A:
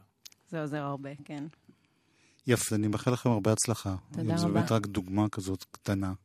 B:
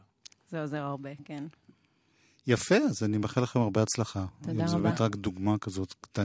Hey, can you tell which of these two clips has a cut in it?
A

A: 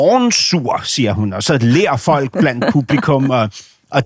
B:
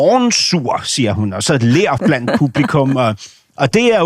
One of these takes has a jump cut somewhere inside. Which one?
B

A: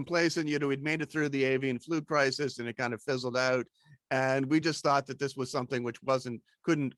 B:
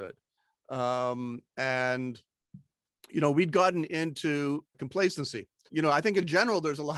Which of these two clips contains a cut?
B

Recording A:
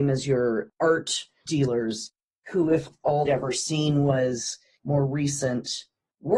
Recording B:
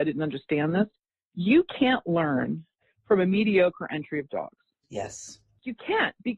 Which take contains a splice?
A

